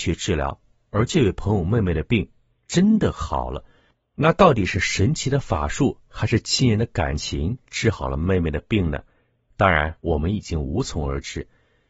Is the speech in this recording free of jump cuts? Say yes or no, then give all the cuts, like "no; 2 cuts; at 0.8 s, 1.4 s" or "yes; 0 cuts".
no; 2 cuts; at 6.1 s, 10.0 s